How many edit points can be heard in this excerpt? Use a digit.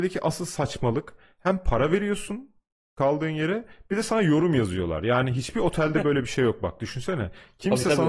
0